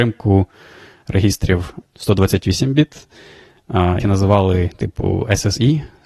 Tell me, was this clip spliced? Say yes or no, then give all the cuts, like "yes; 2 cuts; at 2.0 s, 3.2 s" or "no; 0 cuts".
yes; 2 cuts; at 1.8 s, 4.0 s